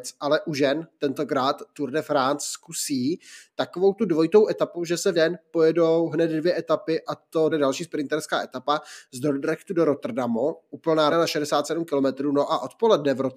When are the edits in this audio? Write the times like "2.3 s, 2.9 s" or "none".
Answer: 5.1 s, 7.5 s, 11.1 s